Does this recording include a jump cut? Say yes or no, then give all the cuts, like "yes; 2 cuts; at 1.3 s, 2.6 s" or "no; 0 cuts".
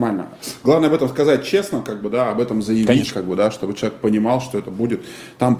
no; 0 cuts